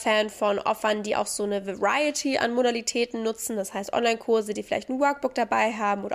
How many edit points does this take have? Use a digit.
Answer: 0